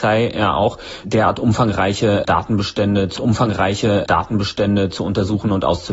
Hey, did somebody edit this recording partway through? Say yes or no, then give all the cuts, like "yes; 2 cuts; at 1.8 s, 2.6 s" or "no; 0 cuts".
yes; 2 cuts; at 1.0 s, 3.2 s